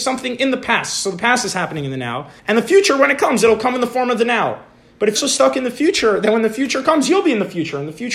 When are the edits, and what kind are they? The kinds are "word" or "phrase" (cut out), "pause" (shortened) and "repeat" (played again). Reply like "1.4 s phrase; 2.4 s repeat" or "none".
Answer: 2.4 s pause; 5.2 s word